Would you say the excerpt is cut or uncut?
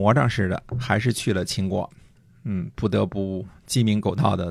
uncut